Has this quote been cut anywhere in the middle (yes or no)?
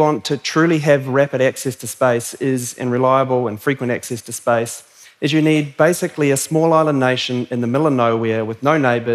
no